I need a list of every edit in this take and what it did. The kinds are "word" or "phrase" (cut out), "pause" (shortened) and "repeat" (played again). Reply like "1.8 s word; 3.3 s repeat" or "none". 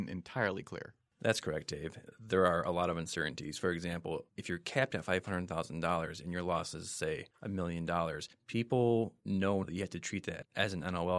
9.6 s word